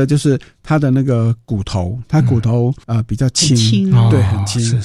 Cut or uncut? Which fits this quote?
cut